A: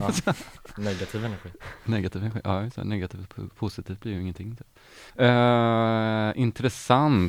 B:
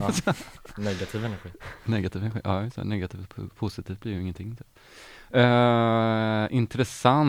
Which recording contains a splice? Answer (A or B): A